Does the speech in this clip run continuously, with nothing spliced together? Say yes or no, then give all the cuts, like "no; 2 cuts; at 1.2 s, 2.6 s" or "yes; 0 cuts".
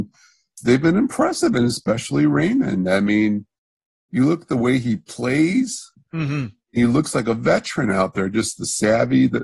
yes; 0 cuts